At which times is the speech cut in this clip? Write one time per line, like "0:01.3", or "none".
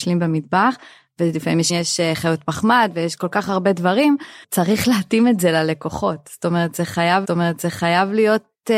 0:01.7
0:04.4
0:07.2